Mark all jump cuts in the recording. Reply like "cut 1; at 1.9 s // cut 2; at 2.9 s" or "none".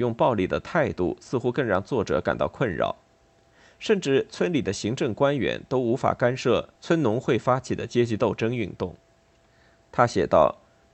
cut 1; at 6.8 s